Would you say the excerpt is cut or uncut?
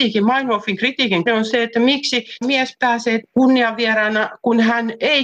cut